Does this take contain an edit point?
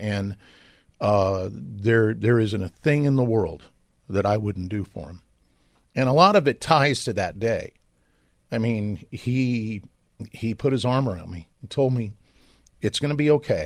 no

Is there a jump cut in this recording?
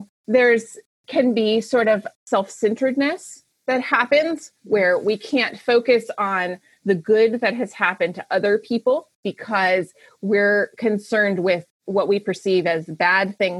yes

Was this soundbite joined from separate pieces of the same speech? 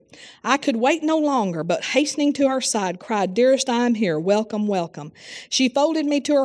no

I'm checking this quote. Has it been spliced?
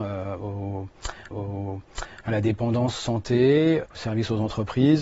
yes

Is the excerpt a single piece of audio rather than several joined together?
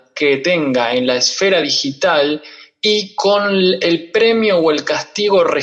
yes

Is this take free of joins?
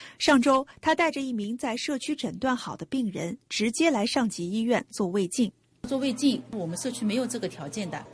yes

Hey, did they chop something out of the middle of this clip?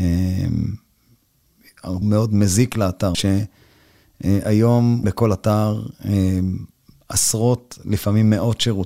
yes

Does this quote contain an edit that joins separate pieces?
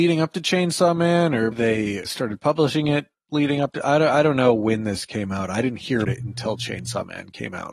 yes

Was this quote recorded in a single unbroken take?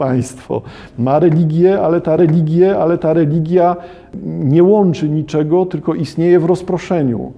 no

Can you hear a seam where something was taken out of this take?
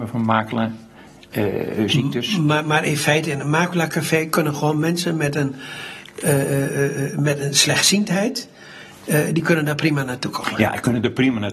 no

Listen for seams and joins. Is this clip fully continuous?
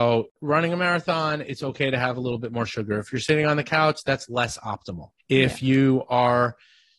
no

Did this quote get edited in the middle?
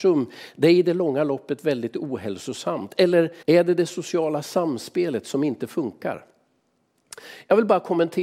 yes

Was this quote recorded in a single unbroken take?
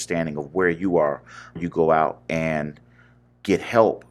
no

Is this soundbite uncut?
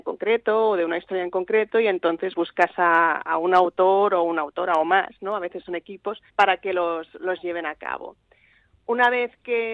no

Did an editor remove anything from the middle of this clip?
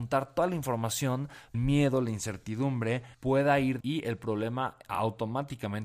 yes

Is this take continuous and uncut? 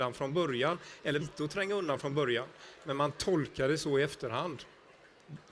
no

